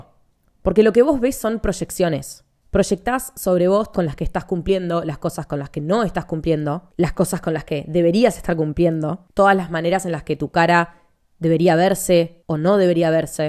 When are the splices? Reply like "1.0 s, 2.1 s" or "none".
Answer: 3.9 s